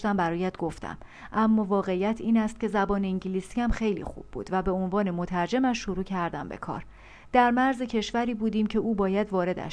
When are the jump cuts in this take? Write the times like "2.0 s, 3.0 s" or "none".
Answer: none